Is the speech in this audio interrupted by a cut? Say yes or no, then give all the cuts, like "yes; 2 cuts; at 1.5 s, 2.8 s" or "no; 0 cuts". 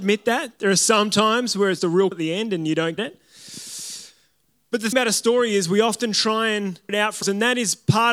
yes; 6 cuts; at 1.8 s, 2.1 s, 3.0 s, 4.9 s, 6.9 s, 7.2 s